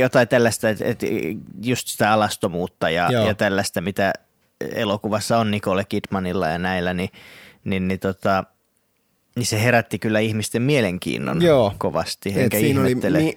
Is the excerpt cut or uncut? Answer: uncut